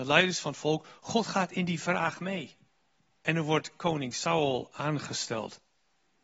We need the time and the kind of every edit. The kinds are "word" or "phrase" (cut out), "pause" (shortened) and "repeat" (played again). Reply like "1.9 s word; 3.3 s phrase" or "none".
2.7 s pause

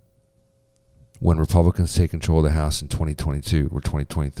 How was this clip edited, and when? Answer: none

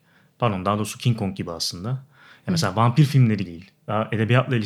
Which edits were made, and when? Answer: 3.5 s word

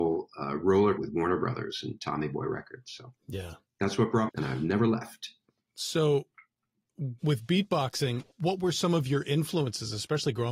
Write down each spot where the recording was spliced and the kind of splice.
1.0 s word; 3.2 s pause; 4.3 s phrase; 7.2 s word; 8.3 s word

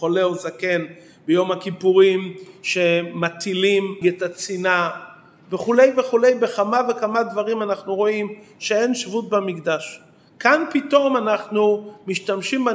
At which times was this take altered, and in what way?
4.0 s phrase

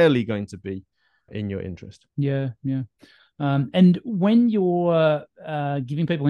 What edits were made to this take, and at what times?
1.3 s word; 2.1 s pause

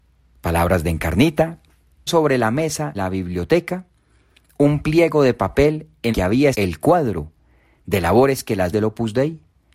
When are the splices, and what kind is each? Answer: 2.1 s word; 2.9 s word; 6.1 s word; 6.5 s word; 8.7 s word

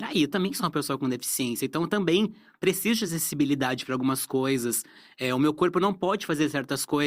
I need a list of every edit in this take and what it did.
none

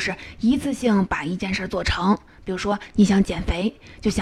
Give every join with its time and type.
none

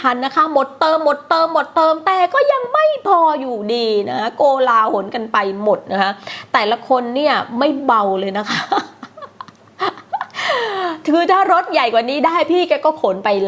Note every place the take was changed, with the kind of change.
none

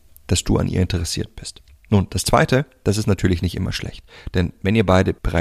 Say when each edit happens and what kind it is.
none

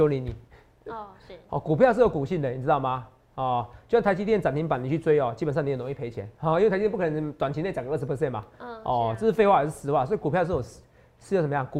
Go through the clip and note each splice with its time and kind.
none

